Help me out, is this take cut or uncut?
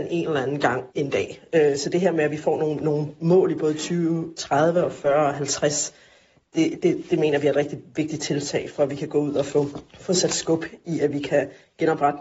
cut